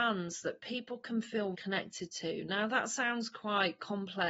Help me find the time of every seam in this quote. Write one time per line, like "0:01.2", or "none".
0:01.5

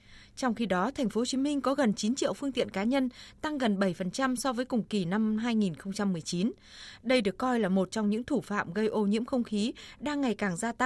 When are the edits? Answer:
none

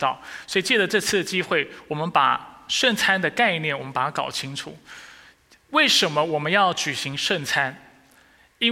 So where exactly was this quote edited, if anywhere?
none

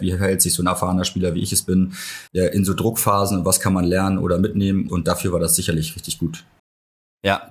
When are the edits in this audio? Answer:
0:02.3
0:04.9

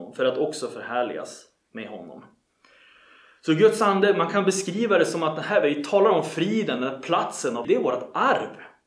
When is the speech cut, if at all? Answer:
0:07.6

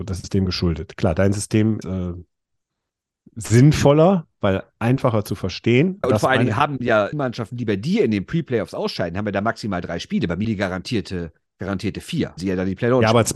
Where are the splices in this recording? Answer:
0:01.8
0:06.0
0:07.1
0:10.4
0:12.4

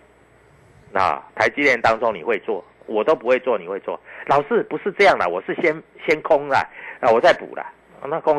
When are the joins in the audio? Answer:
0:01.3

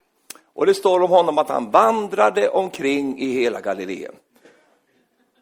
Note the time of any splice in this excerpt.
none

